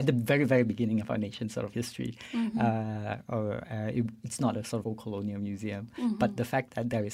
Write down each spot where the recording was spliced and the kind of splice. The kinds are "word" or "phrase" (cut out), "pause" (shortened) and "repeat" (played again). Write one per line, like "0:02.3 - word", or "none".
0:01.7 - word
0:04.8 - word